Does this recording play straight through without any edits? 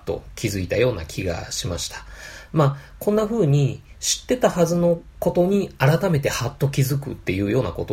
yes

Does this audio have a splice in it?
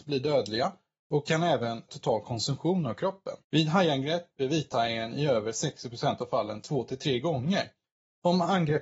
yes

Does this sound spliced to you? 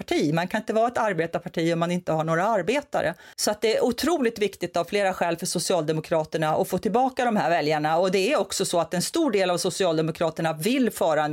yes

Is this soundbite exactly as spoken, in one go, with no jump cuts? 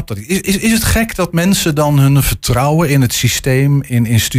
yes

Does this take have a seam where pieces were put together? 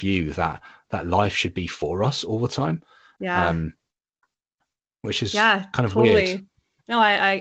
no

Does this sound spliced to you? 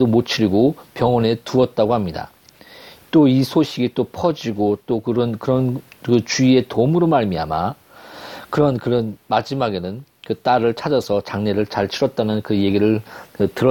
no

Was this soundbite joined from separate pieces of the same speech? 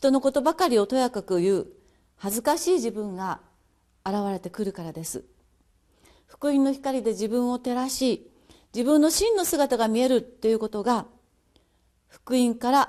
no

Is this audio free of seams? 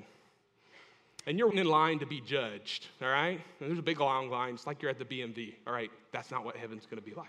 no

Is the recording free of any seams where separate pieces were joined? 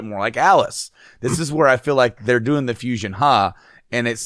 yes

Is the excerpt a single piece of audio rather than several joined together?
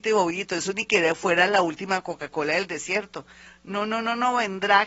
yes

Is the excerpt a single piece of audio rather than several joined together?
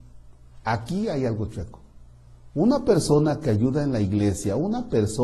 yes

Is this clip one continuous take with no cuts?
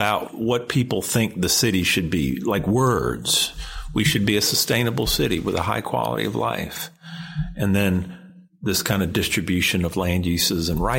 yes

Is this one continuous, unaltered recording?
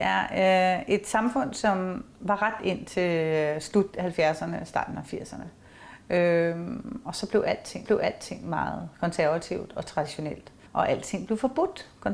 no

